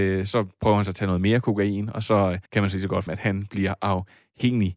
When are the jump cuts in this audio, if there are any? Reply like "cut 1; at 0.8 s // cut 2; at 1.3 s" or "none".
cut 1; at 2.5 s // cut 2; at 3.1 s